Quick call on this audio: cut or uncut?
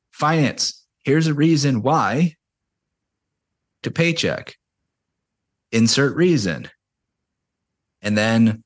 cut